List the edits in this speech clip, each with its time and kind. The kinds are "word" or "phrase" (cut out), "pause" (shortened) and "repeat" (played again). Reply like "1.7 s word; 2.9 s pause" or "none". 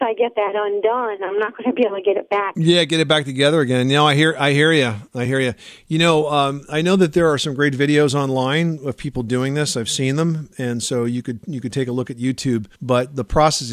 12.7 s pause

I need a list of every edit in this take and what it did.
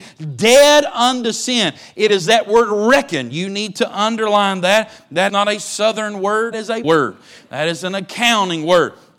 5.3 s word; 6.5 s word; 6.8 s word

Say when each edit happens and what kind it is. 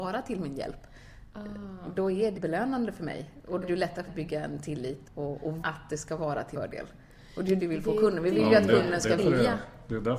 2.3 s word; 3.6 s word; 4.1 s word; 5.0 s word; 5.6 s word; 6.5 s word; 7.6 s word; 9.2 s word

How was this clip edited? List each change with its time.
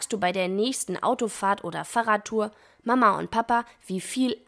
none

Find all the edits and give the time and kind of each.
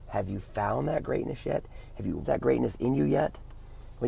2.2 s word

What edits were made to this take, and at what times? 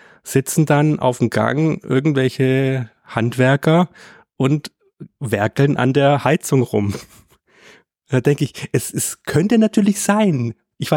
none

